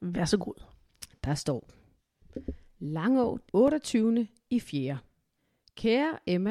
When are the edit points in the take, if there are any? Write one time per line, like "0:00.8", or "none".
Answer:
0:03.5
0:05.4